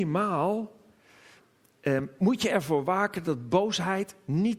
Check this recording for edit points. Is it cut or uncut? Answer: uncut